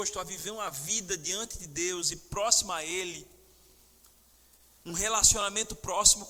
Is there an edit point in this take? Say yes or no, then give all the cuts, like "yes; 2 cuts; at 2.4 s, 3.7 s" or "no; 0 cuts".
no; 0 cuts